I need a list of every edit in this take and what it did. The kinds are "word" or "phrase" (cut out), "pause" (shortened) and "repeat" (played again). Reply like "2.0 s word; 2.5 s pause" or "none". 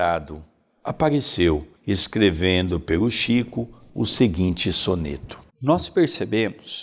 1.7 s pause; 5.5 s pause